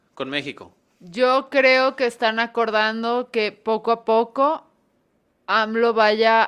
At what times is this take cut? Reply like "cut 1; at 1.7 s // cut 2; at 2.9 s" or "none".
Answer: cut 1; at 0.9 s